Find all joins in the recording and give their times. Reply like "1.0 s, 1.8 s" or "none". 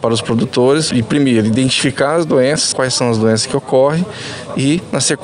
0.9 s, 2.7 s